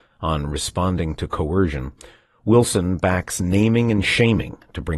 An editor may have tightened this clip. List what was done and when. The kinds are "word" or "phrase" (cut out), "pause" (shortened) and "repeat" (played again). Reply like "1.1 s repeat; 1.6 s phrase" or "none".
none